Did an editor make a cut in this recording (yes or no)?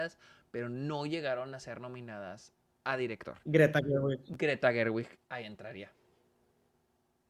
no